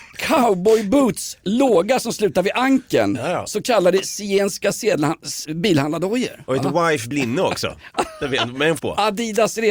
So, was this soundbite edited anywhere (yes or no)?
yes